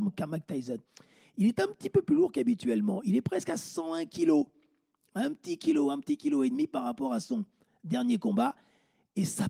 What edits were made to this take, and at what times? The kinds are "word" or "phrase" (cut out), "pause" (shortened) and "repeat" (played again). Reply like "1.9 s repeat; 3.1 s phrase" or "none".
none